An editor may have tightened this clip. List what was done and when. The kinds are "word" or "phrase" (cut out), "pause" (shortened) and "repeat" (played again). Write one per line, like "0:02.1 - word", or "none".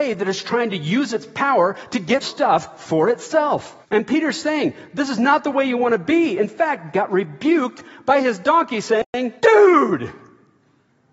0:02.2 - word
0:03.8 - pause
0:06.9 - word
0:09.4 - pause

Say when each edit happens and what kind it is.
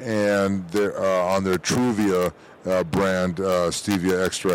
none

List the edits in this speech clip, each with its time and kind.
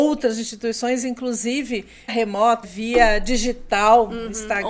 0:02.1 - word
0:02.6 - word

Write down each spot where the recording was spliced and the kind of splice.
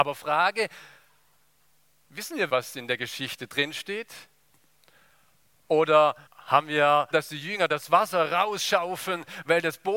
0:02.5 - word
0:06.3 - pause
0:07.1 - phrase

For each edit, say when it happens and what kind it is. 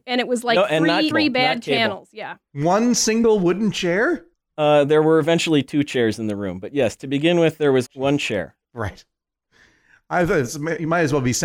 0:01.1 - word
0:02.4 - pause
0:04.3 - pause
0:07.9 - word
0:08.6 - pause

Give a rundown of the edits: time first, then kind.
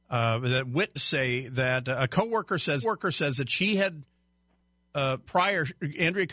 0:01.0 - word
0:02.8 - repeat
0:05.2 - pause

